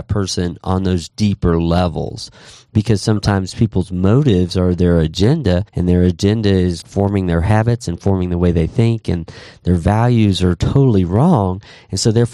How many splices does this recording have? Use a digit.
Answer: 2